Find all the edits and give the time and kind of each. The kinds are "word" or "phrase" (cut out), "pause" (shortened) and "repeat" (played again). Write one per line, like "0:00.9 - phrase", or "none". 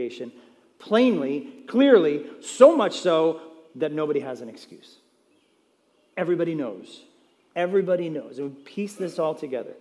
none